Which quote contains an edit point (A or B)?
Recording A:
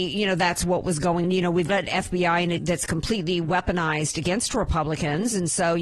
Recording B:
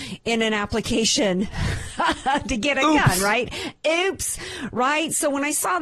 A